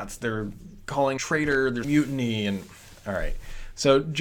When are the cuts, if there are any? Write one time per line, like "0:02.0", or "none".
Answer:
0:01.2
0:01.8